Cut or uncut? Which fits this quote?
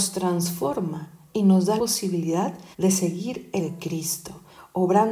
cut